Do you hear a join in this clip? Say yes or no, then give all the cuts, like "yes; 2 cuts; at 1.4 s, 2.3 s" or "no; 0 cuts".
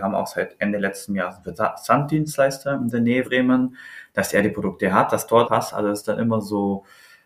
yes; 2 cuts; at 3.2 s, 5.4 s